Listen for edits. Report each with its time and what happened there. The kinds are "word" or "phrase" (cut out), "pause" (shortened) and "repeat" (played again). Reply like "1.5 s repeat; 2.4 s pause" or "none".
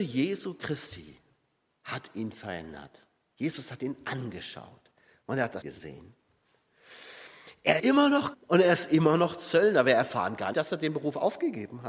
5.6 s word; 7.8 s word; 8.3 s word; 10.5 s word